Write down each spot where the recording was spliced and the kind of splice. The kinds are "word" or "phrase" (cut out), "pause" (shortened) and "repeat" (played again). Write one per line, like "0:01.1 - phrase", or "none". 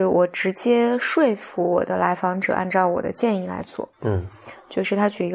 0:03.9 - pause